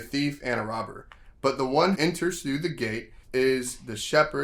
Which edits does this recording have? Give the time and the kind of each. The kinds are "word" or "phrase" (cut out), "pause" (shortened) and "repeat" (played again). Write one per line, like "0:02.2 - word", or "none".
0:02.0 - word
0:03.2 - pause